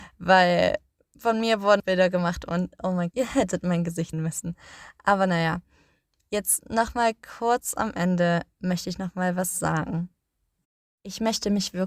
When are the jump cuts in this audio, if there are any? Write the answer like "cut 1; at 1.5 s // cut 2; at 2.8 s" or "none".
cut 1; at 1.8 s // cut 2; at 3.1 s // cut 3; at 4.1 s